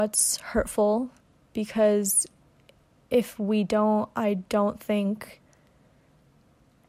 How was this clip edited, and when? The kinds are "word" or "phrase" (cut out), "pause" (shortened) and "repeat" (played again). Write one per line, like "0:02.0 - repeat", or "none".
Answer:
none